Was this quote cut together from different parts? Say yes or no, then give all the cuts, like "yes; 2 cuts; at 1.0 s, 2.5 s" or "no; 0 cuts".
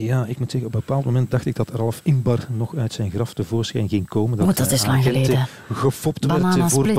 no; 0 cuts